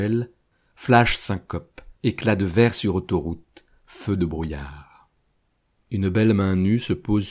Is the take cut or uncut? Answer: cut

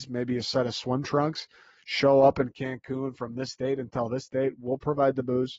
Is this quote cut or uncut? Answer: uncut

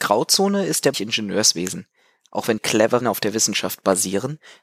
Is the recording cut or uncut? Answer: cut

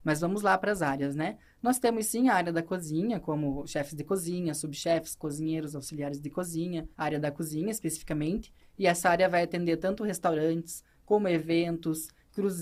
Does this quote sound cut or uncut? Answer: cut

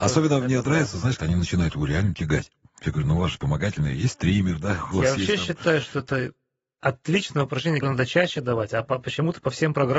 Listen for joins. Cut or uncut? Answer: cut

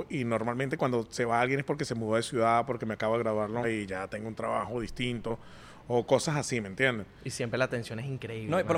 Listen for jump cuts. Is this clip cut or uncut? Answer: cut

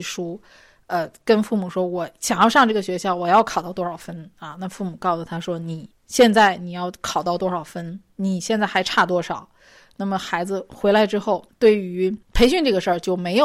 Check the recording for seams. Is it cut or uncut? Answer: cut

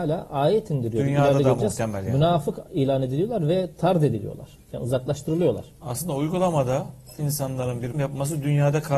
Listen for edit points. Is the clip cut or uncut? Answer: cut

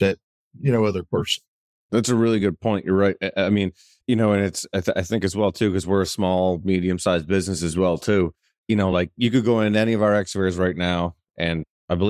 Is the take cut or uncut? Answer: uncut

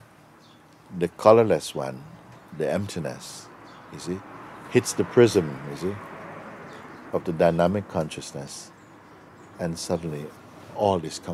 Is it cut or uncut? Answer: uncut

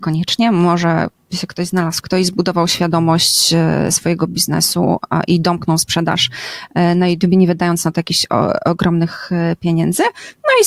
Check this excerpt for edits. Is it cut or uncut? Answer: cut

